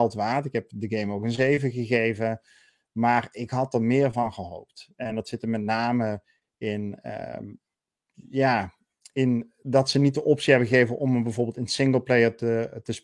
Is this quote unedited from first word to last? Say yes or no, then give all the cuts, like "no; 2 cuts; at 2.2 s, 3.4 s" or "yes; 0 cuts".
yes; 0 cuts